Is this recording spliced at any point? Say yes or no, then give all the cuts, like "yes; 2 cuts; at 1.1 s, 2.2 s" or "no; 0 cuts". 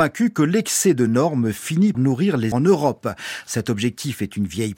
yes; 2 cuts; at 1.9 s, 2.5 s